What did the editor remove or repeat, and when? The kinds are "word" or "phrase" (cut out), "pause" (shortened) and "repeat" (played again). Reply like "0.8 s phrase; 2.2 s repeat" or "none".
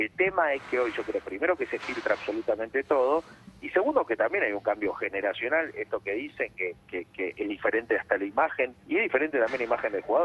8.8 s pause